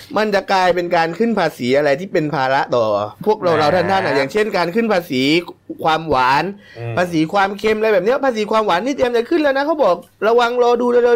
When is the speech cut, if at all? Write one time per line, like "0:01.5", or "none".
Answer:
0:03.2